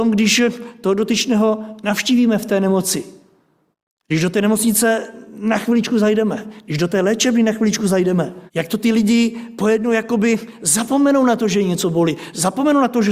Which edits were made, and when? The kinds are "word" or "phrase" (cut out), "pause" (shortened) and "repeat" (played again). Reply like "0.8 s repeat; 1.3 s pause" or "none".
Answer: 3.7 s pause; 8.5 s pause